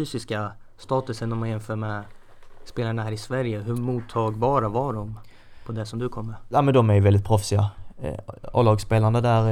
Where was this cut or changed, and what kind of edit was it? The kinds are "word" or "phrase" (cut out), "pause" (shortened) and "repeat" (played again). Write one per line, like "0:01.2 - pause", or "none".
none